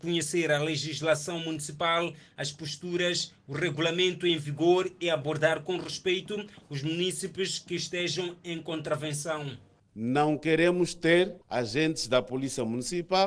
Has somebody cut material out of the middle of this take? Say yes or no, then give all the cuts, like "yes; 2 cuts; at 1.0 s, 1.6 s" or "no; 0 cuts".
yes; 1 cut; at 11.4 s